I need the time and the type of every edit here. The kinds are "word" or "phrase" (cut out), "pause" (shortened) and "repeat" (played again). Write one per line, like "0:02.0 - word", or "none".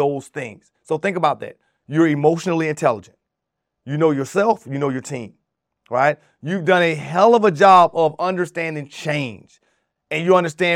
none

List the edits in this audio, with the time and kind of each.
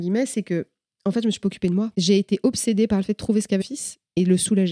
0:03.6 - word

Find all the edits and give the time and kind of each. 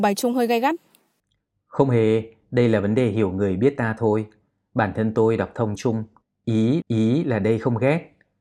0:05.8 - phrase
0:06.8 - repeat

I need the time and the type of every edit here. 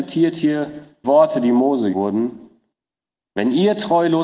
0:01.0 - word
0:01.9 - word

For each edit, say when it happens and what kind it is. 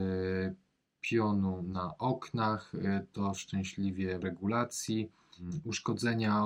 0:04.2 - phrase

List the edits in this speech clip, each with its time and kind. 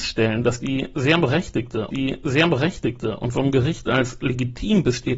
0:01.9 - repeat

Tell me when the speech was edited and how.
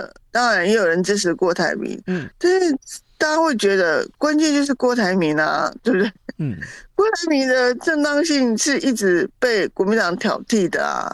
0:04.1 - pause

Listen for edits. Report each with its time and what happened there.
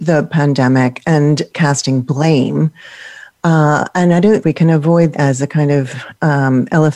0:01.5 - word
0:04.4 - word
0:05.1 - word

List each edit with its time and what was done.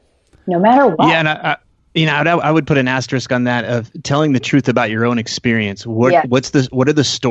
none

